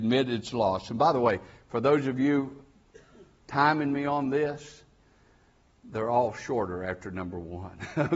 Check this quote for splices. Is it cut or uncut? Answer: uncut